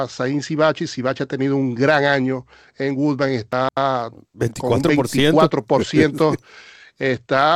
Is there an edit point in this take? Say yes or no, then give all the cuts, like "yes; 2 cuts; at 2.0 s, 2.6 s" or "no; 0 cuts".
no; 0 cuts